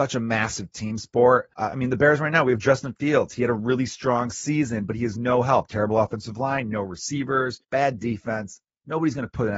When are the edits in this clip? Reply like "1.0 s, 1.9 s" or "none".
1.5 s, 7.6 s